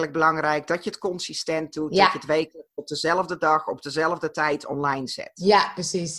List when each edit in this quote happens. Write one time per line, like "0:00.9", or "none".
none